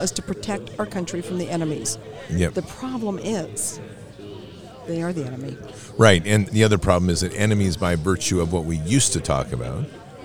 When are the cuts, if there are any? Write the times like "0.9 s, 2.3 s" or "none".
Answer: 6.5 s